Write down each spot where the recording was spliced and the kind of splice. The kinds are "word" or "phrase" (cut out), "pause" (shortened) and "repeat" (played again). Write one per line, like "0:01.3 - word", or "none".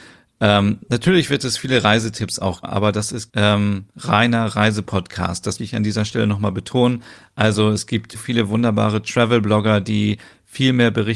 0:02.6 - word
0:03.3 - word
0:05.6 - word
0:08.1 - word